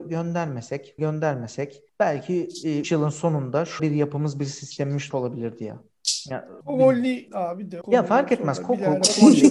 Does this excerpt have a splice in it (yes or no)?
yes